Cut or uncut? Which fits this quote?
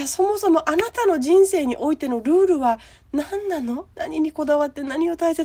cut